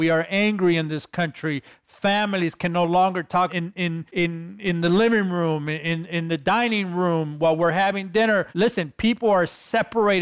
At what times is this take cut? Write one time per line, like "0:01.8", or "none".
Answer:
0:03.5
0:04.1
0:08.5